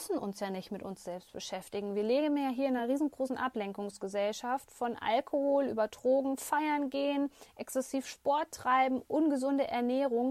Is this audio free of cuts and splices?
yes; 0 cuts

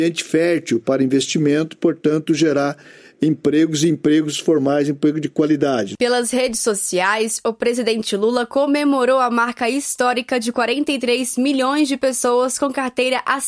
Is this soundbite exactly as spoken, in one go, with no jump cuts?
yes; 0 cuts

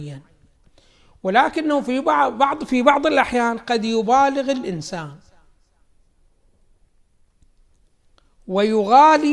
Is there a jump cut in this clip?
no; 0 cuts

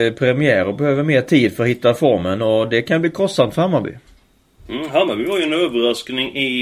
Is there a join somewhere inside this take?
no; 0 cuts

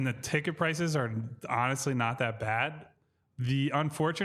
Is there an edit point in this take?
no; 0 cuts

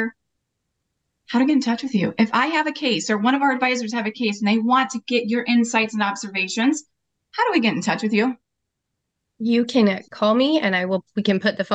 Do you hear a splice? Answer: yes; 1 cut; at 10.1 s

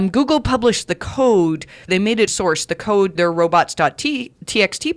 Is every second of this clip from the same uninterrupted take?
no; 3 cuts; at 1.9 s, 2.3 s, 3.2 s

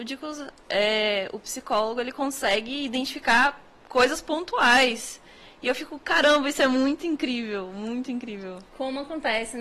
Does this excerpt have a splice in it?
no; 0 cuts

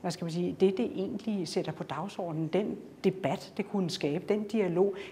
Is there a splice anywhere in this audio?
no; 0 cuts

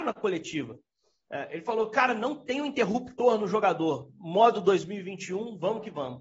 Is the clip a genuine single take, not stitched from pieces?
yes; 0 cuts

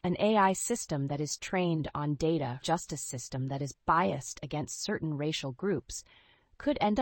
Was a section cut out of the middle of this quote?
yes; 1 cut; at 2.6 s

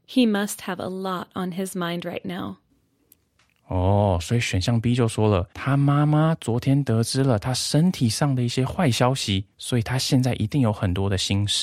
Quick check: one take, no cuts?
no; 2 cuts; at 5.5 s, 9.5 s

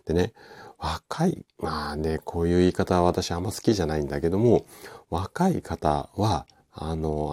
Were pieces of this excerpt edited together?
no; 0 cuts

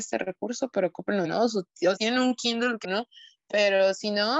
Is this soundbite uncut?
no; 3 cuts; at 1.2 s, 2.0 s, 2.8 s

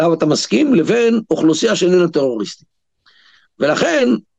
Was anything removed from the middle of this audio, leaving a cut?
no; 0 cuts

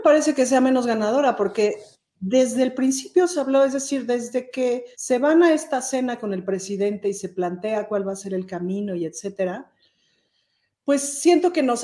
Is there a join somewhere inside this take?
yes; 1 cut; at 4.9 s

